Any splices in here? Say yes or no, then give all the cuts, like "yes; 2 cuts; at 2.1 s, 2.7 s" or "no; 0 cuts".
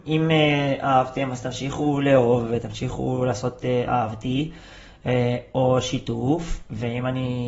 no; 0 cuts